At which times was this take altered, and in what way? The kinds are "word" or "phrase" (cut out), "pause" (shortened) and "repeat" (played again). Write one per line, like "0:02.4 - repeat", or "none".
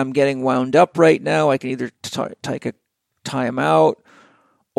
none